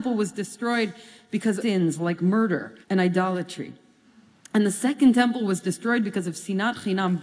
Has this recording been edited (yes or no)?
yes